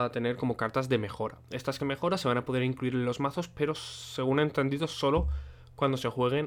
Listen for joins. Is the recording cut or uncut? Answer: cut